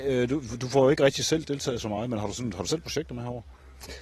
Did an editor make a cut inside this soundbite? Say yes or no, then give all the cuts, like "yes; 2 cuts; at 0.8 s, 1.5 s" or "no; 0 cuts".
no; 0 cuts